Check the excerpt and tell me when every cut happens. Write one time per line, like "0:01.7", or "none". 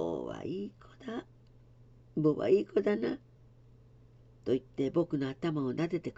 none